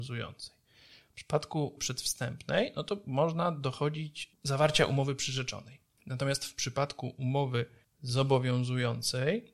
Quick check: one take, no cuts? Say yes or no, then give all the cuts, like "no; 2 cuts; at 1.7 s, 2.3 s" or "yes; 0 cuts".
no; 2 cuts; at 1.8 s, 4.3 s